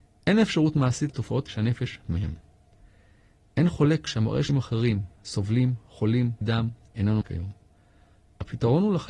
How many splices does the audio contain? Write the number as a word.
six